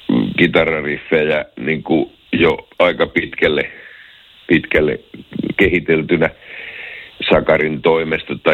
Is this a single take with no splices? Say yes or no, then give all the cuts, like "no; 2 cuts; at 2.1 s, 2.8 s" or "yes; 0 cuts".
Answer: yes; 0 cuts